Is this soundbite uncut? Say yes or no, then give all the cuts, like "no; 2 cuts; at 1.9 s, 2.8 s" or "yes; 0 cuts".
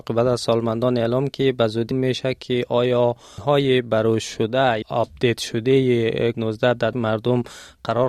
no; 6 cuts; at 1.3 s, 1.9 s, 3.4 s, 4.8 s, 6.3 s, 6.9 s